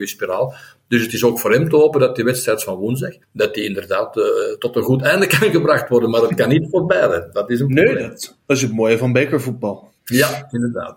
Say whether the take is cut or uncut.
cut